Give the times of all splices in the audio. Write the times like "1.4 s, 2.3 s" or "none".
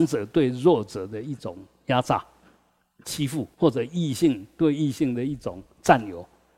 3.5 s